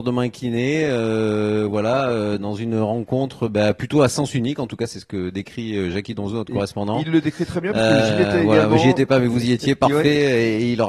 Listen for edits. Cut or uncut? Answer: uncut